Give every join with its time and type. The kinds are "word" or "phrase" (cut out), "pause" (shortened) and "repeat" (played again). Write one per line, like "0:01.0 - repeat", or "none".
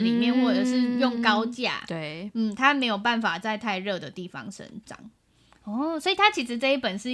none